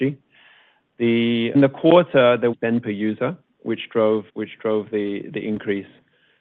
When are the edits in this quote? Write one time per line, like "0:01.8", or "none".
0:01.5
0:02.5
0:04.3